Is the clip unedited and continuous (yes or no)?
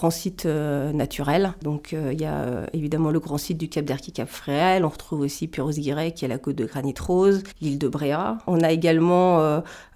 yes